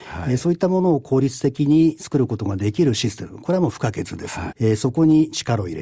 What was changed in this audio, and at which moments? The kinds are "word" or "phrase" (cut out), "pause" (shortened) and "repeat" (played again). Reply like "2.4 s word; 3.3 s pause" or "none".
4.5 s word